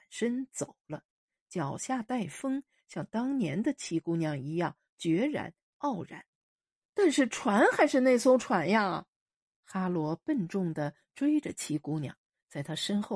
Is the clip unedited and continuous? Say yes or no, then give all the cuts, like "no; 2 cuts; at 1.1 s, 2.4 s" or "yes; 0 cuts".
yes; 0 cuts